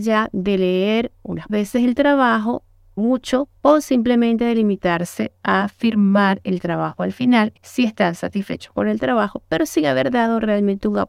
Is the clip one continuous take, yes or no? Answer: no